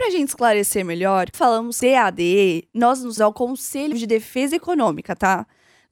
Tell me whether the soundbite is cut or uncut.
cut